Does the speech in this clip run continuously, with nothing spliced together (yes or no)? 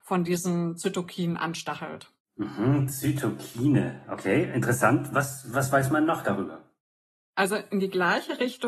yes